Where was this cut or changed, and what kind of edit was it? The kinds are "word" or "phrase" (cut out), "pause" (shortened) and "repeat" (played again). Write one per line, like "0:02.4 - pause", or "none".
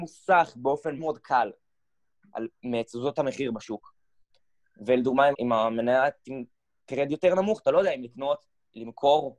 0:01.0 - word
0:05.3 - word